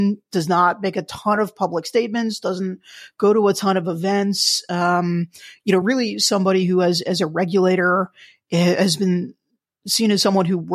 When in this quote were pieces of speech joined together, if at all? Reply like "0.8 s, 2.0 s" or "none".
none